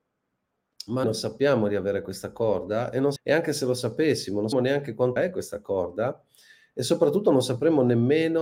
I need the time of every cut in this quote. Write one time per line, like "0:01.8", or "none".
0:01.0
0:03.2
0:04.5
0:05.2